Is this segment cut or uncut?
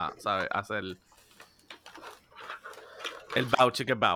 uncut